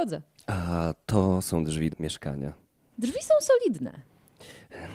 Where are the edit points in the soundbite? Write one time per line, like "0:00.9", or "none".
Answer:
0:01.9